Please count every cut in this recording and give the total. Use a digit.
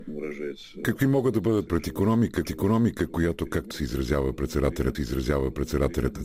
4